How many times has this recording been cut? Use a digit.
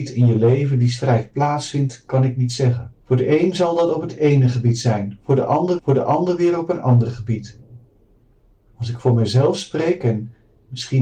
2